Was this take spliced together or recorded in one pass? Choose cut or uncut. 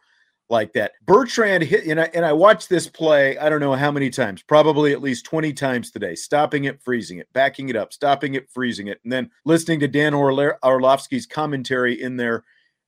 cut